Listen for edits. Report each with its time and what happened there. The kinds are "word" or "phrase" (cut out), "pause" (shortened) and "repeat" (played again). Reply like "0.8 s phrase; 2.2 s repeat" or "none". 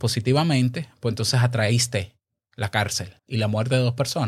2.3 s pause; 3.2 s pause